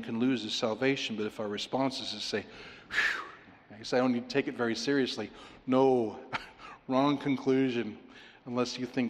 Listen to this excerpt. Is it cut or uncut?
uncut